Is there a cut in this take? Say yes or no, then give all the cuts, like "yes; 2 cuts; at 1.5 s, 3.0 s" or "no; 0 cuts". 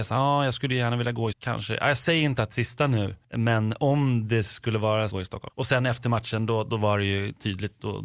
yes; 3 cuts; at 1.3 s, 2.5 s, 5.1 s